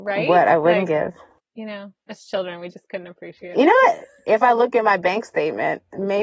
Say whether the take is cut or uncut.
uncut